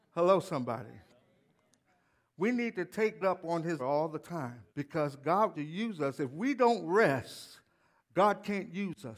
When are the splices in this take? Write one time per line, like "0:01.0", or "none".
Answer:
0:03.2
0:03.8
0:04.7
0:05.5